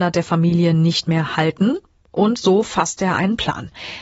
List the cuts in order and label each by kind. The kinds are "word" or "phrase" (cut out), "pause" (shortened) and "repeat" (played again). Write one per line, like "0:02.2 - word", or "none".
none